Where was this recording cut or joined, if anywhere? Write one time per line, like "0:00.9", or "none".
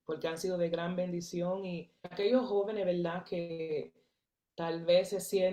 0:02.0